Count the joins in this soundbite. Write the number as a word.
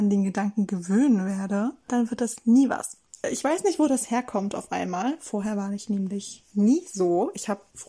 one